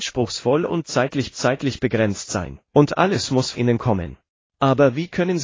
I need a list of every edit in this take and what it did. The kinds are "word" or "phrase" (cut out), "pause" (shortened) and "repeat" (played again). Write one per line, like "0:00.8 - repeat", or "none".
0:01.3 - repeat
0:02.6 - pause
0:03.5 - word
0:04.3 - pause